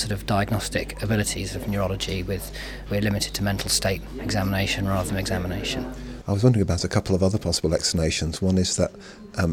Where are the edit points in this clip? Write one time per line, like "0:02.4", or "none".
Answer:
0:02.9
0:05.1